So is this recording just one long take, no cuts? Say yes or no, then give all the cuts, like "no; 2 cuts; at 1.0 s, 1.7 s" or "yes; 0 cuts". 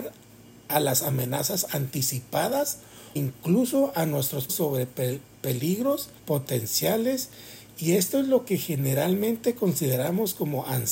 no; 3 cuts; at 3.2 s, 4.5 s, 6.2 s